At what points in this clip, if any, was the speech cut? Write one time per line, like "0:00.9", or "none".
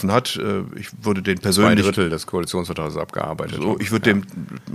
none